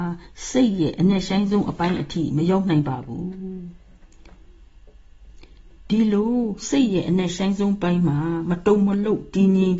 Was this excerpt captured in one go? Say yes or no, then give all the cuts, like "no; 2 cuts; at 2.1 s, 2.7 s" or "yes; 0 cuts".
yes; 0 cuts